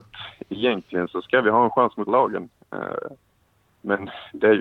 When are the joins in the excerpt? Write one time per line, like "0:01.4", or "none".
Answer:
0:02.1

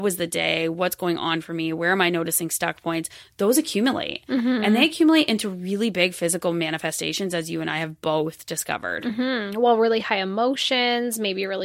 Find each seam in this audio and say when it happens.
none

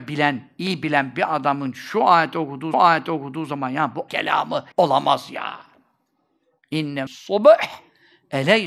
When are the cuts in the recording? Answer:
0:02.7
0:04.1
0:04.7
0:07.1

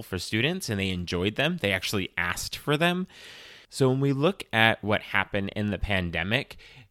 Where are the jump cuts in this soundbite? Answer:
none

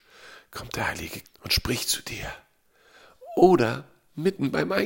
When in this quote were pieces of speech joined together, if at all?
0:01.2

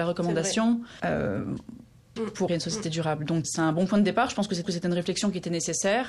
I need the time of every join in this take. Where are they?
0:01.0
0:02.2
0:02.5
0:03.4
0:04.6

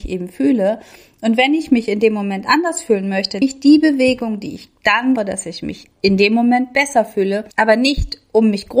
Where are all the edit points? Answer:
0:03.4
0:05.2
0:07.5

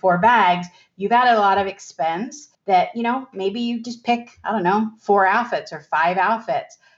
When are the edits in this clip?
0:02.5

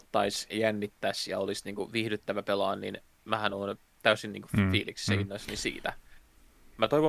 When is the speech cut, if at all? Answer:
none

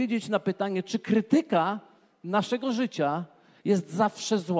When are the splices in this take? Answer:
none

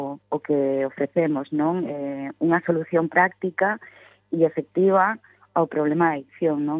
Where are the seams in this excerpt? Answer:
none

